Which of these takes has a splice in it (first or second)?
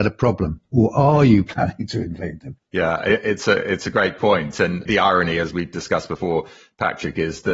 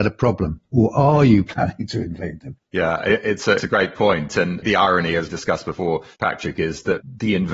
second